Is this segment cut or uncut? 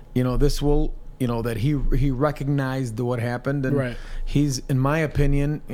uncut